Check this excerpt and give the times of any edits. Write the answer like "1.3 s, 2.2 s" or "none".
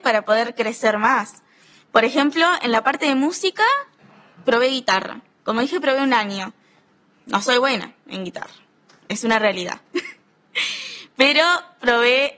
none